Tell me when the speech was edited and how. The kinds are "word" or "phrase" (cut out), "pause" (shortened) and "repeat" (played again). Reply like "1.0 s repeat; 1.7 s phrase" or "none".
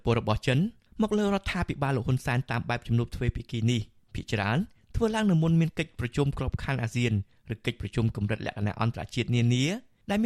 none